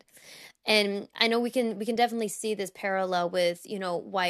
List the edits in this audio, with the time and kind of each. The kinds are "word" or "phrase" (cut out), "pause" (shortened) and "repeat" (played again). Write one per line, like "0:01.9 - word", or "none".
none